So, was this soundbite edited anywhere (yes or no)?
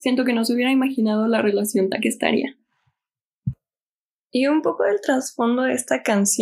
yes